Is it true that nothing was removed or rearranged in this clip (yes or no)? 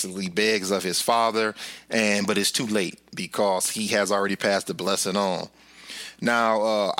yes